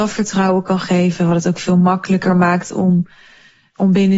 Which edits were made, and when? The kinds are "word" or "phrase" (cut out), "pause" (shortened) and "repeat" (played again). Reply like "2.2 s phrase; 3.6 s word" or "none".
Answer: none